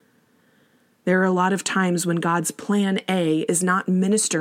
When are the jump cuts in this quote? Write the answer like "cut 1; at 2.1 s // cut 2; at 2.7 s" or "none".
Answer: none